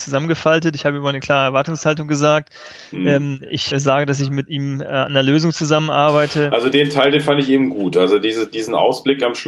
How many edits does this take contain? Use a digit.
2